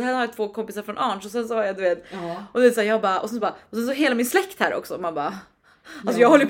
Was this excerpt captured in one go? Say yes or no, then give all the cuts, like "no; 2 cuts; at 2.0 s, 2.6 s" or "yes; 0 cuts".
yes; 0 cuts